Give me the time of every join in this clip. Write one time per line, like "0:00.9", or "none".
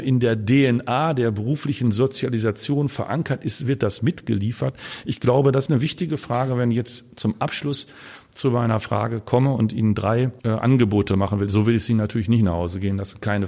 0:05.7
0:10.4